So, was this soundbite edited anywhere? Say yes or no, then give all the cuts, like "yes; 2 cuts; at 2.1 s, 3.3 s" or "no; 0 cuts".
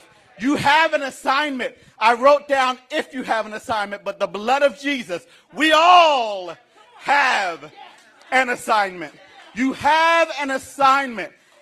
no; 0 cuts